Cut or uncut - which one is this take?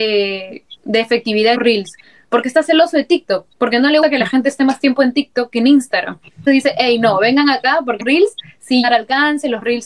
cut